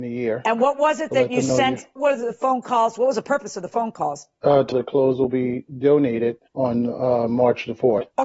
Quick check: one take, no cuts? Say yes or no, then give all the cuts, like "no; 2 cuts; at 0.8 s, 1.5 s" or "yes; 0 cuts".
no; 3 cuts; at 2.0 s, 4.7 s, 6.5 s